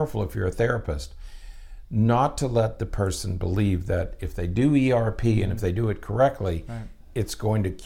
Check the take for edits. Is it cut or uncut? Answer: uncut